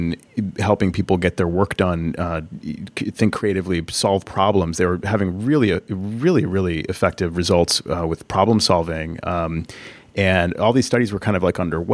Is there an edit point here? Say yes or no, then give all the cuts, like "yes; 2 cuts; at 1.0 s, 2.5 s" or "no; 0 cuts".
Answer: no; 0 cuts